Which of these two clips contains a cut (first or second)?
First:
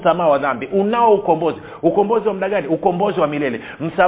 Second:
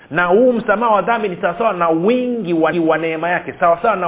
second